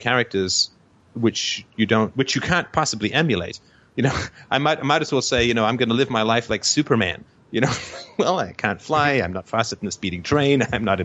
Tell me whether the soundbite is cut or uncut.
uncut